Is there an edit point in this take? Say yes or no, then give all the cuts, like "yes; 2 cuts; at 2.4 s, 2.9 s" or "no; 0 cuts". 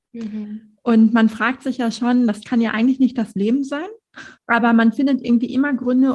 yes; 1 cut; at 4.4 s